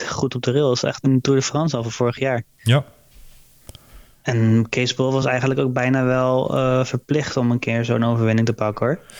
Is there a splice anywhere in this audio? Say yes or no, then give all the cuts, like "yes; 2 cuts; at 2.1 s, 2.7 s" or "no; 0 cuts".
no; 0 cuts